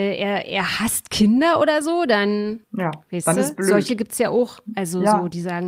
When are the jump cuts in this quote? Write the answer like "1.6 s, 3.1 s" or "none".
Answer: none